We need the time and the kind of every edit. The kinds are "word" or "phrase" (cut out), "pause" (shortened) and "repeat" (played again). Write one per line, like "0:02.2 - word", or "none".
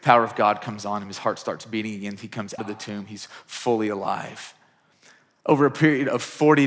0:02.6 - word